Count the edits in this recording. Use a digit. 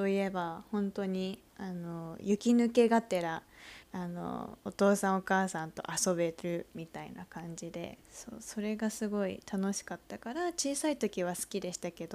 3